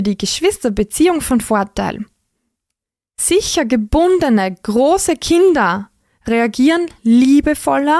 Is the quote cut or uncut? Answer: uncut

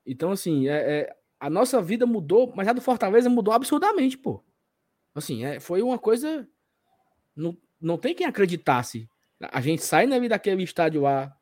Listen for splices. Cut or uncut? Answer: uncut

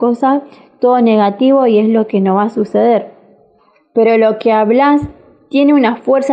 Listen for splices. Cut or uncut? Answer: cut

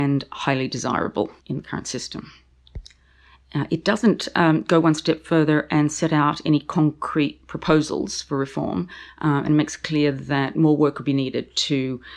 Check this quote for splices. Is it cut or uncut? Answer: cut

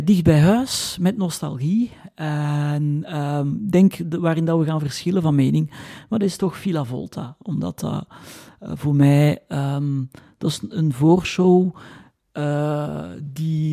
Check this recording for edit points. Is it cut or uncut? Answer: uncut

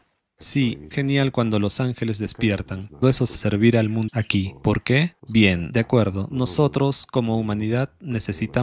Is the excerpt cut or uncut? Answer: cut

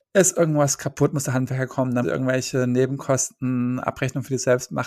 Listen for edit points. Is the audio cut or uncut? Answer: cut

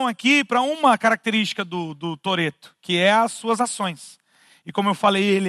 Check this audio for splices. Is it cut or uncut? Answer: uncut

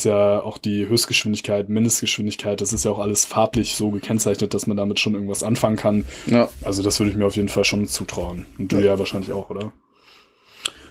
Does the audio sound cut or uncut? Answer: uncut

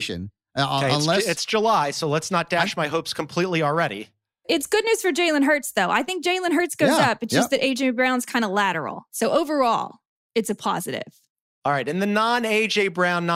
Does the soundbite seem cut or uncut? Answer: uncut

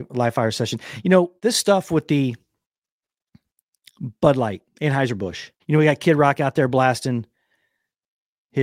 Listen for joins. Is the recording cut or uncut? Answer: cut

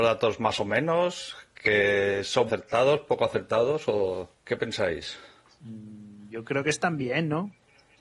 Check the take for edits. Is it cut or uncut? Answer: cut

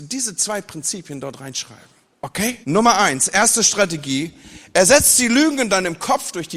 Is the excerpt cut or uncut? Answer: cut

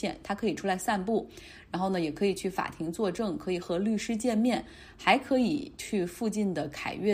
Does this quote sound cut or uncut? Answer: uncut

